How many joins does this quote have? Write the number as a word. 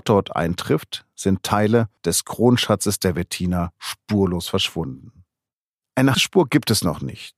two